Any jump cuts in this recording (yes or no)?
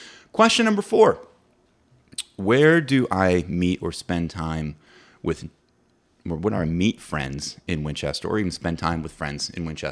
no